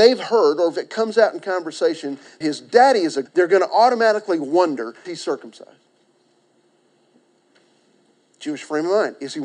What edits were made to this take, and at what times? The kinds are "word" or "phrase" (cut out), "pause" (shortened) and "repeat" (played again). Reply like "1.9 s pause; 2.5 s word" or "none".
2.4 s word; 3.3 s word; 5.0 s word